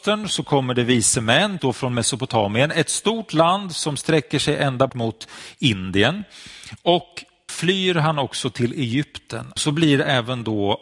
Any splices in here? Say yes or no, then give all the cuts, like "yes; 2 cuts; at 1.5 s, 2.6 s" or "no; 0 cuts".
yes; 4 cuts; at 1.6 s, 4.9 s, 7.5 s, 9.6 s